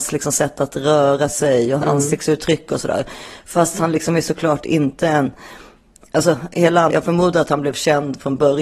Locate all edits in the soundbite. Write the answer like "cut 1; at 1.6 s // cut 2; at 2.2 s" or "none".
cut 1; at 1.8 s // cut 2; at 6.9 s